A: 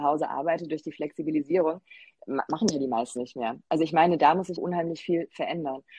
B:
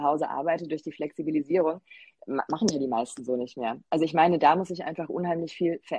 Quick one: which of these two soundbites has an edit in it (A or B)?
A